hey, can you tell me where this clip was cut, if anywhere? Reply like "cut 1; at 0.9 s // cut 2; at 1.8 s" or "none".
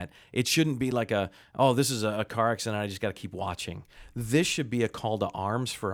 none

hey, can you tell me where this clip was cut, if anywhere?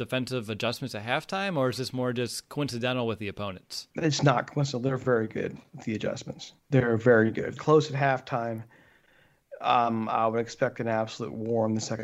cut 1; at 3.9 s // cut 2; at 6.6 s // cut 3; at 7.6 s

